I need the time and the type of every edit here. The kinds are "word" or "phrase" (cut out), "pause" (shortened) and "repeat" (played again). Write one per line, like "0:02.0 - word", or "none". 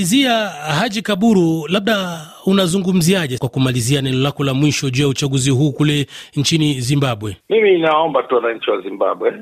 0:03.4 - word
0:07.4 - pause